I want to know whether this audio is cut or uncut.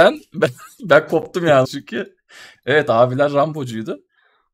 cut